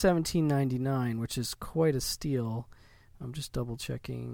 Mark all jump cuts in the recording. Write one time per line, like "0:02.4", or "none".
none